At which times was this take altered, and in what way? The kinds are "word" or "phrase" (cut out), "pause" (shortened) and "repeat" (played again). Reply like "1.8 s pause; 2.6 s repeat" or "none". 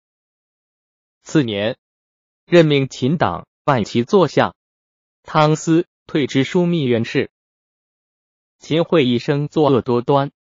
none

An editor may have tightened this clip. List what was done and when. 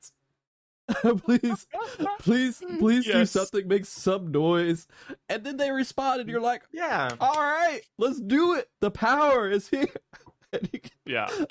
8.7 s pause

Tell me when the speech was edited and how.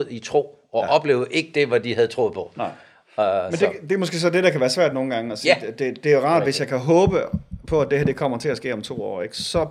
none

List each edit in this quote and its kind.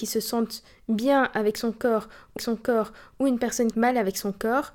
2.4 s repeat; 3.7 s phrase

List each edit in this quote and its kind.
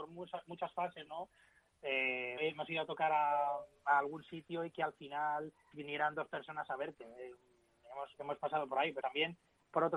2.4 s word; 5.7 s word; 9.0 s word

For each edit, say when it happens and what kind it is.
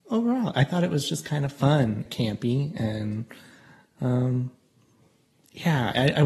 2.1 s phrase

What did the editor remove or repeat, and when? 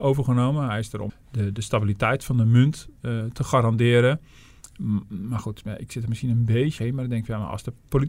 1.1 s word; 6.8 s word

